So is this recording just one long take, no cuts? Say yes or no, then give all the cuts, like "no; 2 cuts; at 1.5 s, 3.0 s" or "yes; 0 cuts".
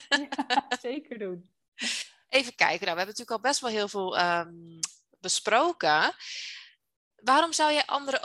yes; 0 cuts